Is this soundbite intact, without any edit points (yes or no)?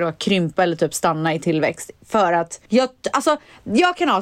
no